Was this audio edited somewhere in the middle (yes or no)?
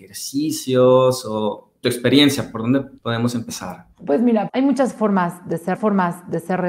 yes